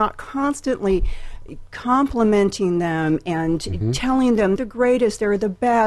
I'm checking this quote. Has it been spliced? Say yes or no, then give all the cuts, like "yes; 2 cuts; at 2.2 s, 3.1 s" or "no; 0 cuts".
yes; 1 cut; at 4.6 s